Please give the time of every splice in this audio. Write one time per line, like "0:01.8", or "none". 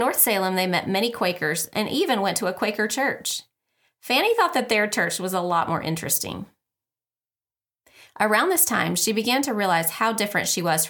none